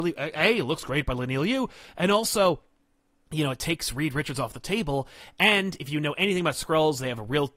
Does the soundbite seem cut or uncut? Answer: uncut